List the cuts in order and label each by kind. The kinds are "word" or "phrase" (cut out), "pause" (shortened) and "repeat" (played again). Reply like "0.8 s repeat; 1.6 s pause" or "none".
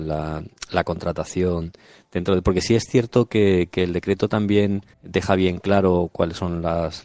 4.9 s pause